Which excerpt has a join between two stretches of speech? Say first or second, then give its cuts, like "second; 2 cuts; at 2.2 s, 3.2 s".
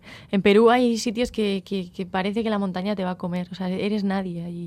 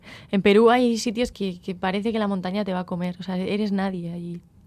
second; 1 cut; at 1.3 s